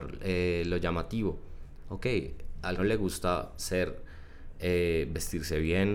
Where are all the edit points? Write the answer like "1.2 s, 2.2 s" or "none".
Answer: 2.8 s